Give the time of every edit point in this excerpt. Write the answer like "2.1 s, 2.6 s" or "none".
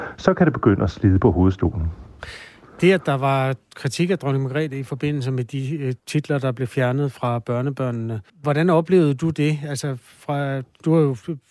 6.0 s, 8.3 s